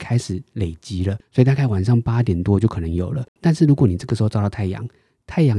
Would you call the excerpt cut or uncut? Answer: cut